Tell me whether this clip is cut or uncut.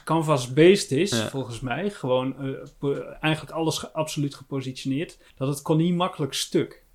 cut